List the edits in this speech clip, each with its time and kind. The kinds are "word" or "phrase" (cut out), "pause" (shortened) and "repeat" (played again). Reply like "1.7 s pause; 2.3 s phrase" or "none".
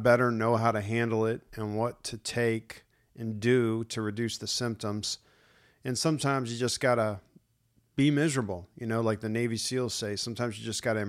none